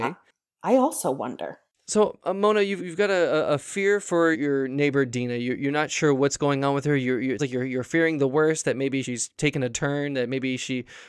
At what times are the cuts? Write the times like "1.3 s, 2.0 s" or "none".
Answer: 2.8 s, 4.3 s, 7.4 s, 9.0 s, 9.7 s